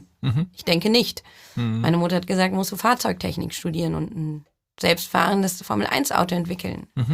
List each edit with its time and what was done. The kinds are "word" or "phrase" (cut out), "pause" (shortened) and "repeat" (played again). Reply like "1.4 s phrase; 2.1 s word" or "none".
none